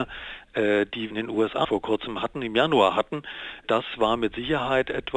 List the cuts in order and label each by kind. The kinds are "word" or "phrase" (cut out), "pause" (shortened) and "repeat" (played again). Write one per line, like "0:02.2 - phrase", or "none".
0:01.1 - word
0:01.6 - phrase